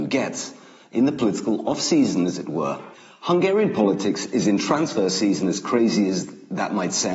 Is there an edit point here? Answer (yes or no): yes